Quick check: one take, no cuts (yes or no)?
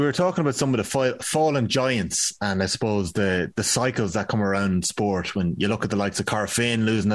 yes